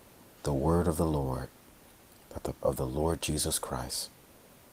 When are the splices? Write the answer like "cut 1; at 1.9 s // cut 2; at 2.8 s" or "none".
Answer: cut 1; at 2.6 s